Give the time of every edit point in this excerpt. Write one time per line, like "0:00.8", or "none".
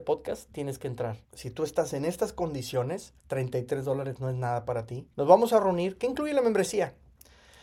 0:01.2
0:03.2
0:05.1